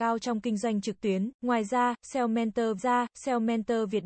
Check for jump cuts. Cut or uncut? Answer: cut